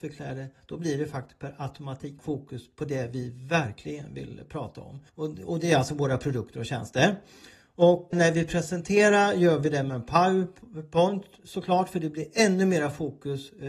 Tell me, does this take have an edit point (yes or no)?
yes